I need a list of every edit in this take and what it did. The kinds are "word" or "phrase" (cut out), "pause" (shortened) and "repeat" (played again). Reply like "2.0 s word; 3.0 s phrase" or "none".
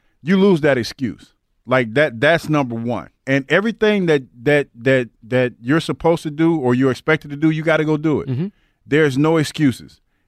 3.1 s pause